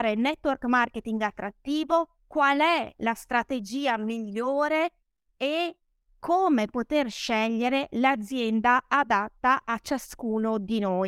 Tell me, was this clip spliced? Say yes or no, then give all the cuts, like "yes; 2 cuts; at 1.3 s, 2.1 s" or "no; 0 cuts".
no; 0 cuts